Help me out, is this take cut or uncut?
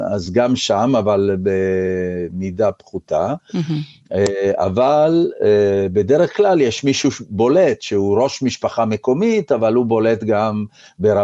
uncut